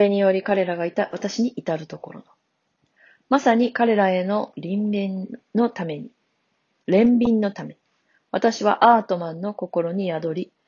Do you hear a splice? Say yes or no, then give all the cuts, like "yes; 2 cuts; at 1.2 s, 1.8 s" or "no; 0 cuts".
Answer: no; 0 cuts